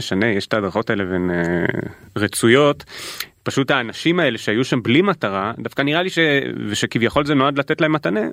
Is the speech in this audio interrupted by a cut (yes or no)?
no